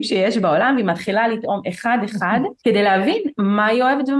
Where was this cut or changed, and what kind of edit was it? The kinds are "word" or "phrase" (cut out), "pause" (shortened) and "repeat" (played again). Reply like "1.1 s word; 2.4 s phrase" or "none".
2.6 s pause